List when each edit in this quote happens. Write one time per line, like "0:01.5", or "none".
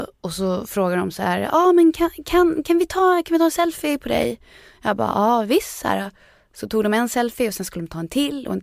none

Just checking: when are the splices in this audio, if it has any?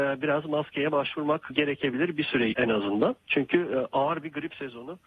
0:01.5
0:02.5

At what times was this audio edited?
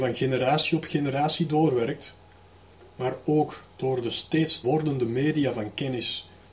0:04.6

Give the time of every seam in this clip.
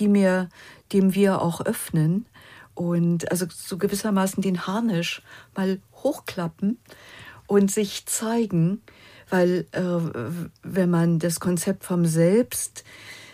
none

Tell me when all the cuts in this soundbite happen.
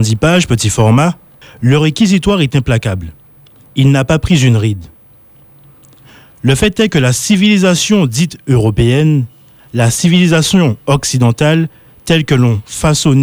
0:01.4

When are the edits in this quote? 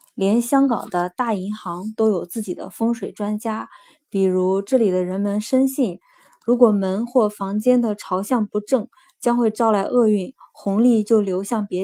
none

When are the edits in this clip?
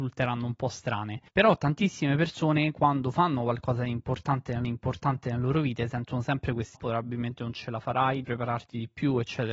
0:01.3
0:04.6
0:06.7
0:08.2

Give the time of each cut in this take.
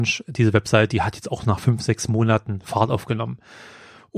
none

